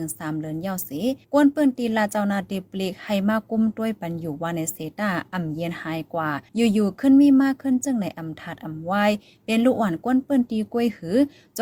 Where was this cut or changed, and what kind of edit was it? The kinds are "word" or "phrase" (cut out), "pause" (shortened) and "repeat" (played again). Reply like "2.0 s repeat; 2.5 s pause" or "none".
1.2 s pause; 6.5 s pause

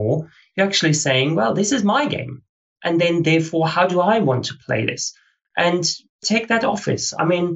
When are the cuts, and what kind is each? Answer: none

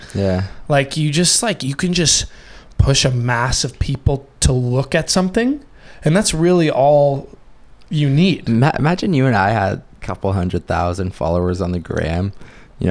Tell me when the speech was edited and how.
none

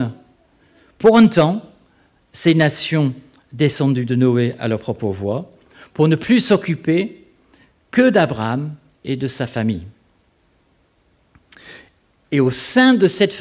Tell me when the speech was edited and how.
none

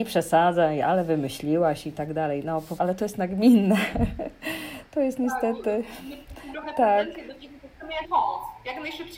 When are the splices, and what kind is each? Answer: 2.8 s word; 6.5 s word; 8.0 s word

